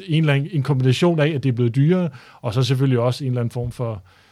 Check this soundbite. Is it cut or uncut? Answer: uncut